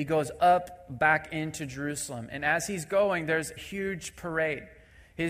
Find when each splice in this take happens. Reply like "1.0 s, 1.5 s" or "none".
3.6 s